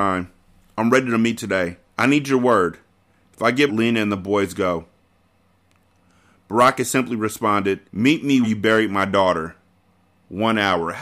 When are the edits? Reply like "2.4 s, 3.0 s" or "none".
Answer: 1.9 s, 3.7 s, 7.9 s, 8.4 s